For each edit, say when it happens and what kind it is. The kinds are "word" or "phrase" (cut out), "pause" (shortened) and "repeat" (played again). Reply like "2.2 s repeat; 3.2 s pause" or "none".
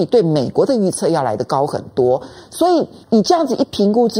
3.0 s pause